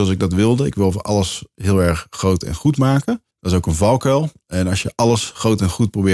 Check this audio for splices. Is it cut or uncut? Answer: cut